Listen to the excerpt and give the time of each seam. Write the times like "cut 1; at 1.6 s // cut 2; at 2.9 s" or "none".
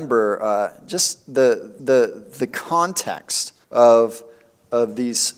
cut 1; at 1.8 s // cut 2; at 3.6 s